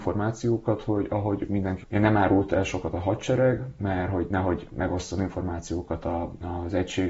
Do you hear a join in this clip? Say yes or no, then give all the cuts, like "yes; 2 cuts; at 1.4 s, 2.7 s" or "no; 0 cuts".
yes; 1 cut; at 1.8 s